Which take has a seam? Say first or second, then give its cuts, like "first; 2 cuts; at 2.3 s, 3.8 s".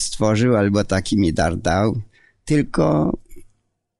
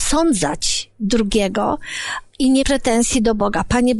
second; 1 cut; at 2.6 s